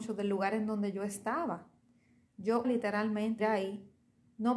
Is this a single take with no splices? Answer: no; 2 cuts; at 2.6 s, 3.4 s

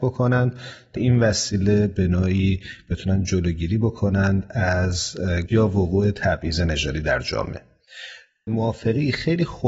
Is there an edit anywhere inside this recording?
yes; 3 cuts; at 1.0 s, 5.5 s, 8.5 s

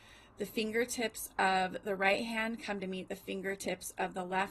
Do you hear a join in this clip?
yes; 1 cut; at 2.8 s

